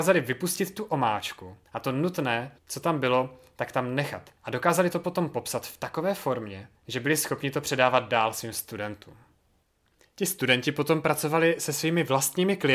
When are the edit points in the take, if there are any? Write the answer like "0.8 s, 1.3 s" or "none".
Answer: 1.7 s, 2.6 s, 4.4 s, 6.8 s